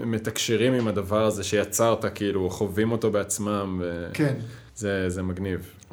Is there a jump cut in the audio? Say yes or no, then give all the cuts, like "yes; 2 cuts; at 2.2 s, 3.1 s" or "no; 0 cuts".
yes; 1 cut; at 4.7 s